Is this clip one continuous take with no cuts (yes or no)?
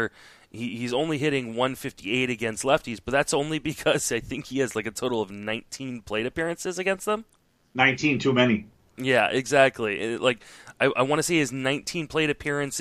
yes